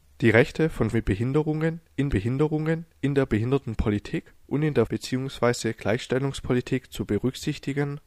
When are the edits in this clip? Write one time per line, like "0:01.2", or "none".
0:00.9
0:02.1
0:04.4
0:04.9